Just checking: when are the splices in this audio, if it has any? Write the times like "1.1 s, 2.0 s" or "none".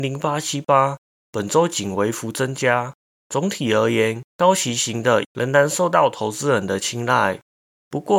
4.3 s, 5.2 s